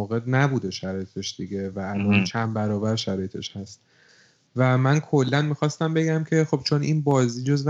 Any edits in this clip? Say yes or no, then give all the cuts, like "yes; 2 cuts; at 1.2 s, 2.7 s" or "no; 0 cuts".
no; 0 cuts